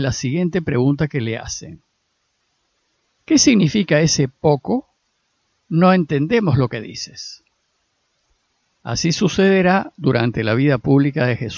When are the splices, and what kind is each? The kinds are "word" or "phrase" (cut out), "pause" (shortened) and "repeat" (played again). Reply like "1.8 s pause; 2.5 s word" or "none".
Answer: none